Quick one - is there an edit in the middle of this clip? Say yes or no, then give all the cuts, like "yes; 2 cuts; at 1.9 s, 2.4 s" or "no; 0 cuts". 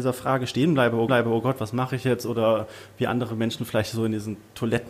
yes; 1 cut; at 1.1 s